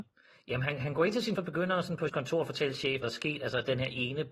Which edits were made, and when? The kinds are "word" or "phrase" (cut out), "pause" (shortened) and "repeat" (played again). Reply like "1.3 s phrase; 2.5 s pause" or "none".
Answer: 1.4 s word; 2.1 s word; 3.0 s word